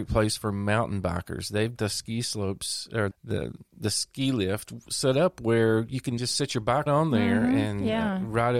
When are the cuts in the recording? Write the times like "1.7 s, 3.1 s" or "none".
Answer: 1.8 s, 3.1 s, 6.2 s, 6.9 s